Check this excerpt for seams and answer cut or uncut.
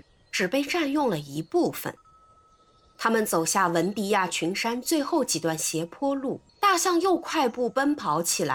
cut